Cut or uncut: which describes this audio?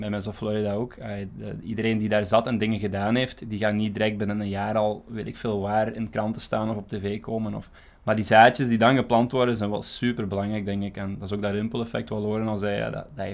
cut